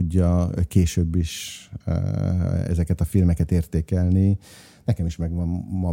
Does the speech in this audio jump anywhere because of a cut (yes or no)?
no